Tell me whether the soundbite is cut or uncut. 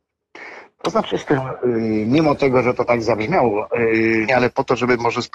cut